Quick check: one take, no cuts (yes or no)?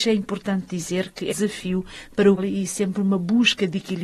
no